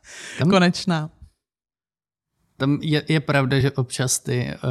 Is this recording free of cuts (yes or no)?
yes